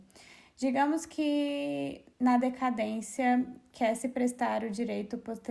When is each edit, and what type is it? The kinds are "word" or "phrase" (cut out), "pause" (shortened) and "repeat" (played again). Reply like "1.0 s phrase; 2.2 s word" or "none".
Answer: none